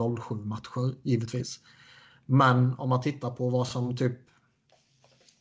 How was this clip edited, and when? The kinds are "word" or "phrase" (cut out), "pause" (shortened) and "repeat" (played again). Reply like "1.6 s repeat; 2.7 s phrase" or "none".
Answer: none